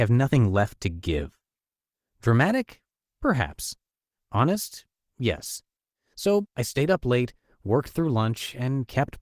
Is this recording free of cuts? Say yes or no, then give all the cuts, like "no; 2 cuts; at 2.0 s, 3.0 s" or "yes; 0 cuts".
yes; 0 cuts